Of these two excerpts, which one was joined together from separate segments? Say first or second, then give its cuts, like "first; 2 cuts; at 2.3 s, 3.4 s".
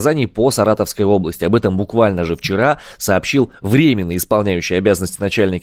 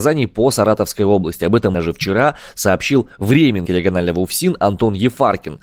second; 2 cuts; at 1.7 s, 3.6 s